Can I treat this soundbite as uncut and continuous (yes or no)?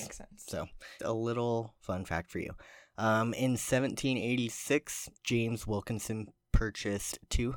no